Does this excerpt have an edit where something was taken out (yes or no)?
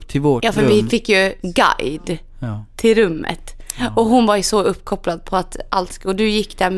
no